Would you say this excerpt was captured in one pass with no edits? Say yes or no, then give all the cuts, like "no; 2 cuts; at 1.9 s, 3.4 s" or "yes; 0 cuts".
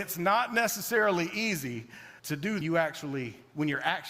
no; 2 cuts; at 2.2 s, 2.6 s